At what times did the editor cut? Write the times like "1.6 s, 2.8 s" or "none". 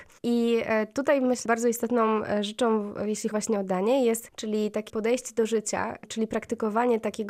1.5 s, 3.3 s, 4.3 s, 4.9 s